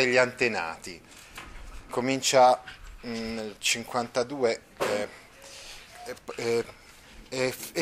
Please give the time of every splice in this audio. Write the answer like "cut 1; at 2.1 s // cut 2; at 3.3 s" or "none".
cut 1; at 1.9 s